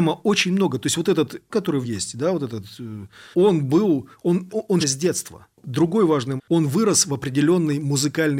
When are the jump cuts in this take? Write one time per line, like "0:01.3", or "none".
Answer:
0:01.5
0:01.8
0:03.3
0:04.5
0:04.8
0:06.4